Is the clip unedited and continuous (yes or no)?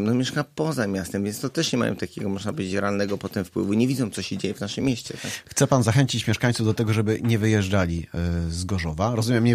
yes